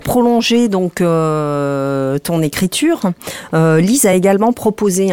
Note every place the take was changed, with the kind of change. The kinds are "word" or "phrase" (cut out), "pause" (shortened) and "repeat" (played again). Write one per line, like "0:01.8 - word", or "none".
none